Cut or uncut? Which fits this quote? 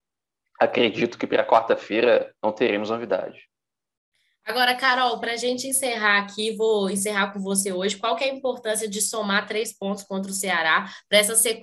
cut